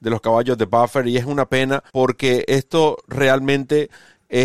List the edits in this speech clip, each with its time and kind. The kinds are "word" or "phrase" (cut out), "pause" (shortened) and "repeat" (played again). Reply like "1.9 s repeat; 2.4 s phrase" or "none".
1.9 s pause